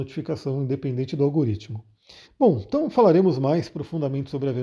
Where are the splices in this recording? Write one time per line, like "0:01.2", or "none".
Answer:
0:02.2